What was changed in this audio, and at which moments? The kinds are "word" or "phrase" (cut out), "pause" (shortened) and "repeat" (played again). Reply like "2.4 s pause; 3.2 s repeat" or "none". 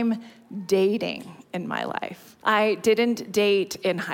2.4 s pause